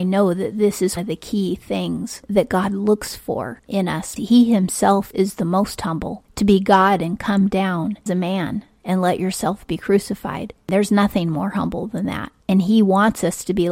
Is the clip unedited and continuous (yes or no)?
no